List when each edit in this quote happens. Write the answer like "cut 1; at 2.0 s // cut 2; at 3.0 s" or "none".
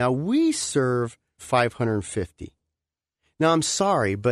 cut 1; at 1.4 s